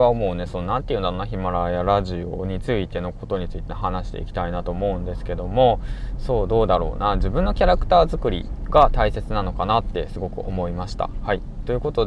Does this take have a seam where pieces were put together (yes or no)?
yes